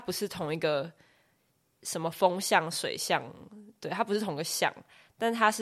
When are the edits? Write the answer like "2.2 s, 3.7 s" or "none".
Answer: none